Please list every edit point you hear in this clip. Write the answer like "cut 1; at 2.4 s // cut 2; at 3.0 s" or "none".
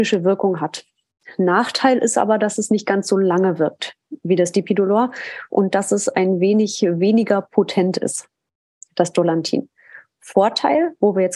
none